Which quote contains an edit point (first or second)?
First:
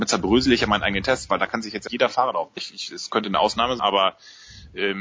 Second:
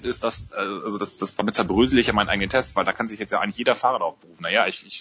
first